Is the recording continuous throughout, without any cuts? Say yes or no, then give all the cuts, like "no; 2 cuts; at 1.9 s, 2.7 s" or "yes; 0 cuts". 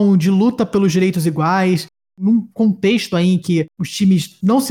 yes; 0 cuts